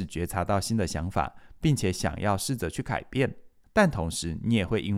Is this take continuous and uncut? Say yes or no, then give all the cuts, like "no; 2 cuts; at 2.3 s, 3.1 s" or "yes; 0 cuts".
no; 1 cut; at 3.6 s